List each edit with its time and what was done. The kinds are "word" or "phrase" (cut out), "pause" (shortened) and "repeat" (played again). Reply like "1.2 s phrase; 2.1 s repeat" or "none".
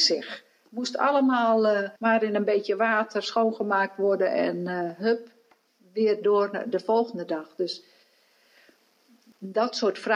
2.0 s pause